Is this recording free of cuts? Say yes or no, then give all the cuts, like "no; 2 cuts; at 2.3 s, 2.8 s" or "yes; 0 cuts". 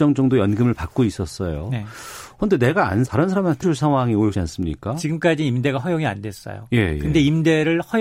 no; 3 cuts; at 3.1 s, 3.6 s, 4.3 s